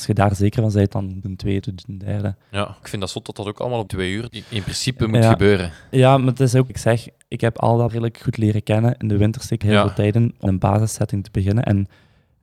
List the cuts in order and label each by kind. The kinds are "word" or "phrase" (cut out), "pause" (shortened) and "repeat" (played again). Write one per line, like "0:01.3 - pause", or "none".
0:01.2 - word
0:01.6 - word
0:02.8 - word
0:03.9 - word
0:04.3 - word
0:06.7 - word
0:07.9 - word
0:09.6 - word
0:10.5 - word